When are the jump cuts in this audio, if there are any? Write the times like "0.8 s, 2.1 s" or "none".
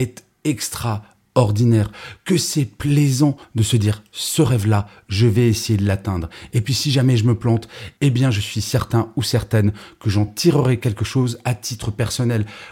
none